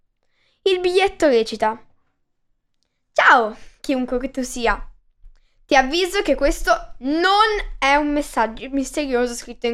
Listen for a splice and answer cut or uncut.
uncut